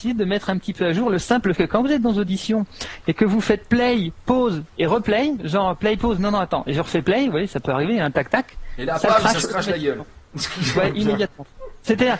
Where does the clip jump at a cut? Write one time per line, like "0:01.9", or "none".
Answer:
0:01.5